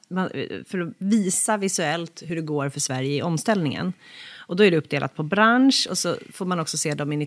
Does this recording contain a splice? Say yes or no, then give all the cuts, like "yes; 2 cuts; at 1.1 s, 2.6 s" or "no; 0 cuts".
no; 0 cuts